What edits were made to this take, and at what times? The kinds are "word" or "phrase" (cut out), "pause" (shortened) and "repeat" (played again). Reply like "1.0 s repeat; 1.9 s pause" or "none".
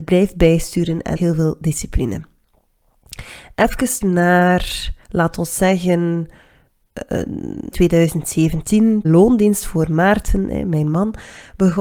1.2 s phrase; 4.0 s word; 5.0 s pause; 7.7 s word; 9.0 s phrase